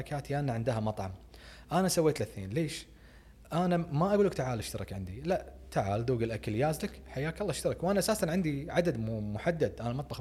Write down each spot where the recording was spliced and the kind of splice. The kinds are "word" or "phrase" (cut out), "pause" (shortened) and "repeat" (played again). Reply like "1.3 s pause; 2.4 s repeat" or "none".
none